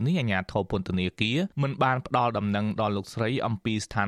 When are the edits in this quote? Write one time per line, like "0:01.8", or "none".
0:01.5